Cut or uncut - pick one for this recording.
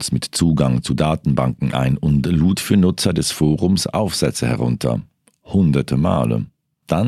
uncut